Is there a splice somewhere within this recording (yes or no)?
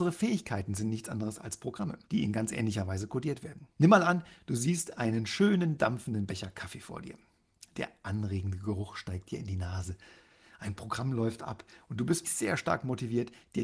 yes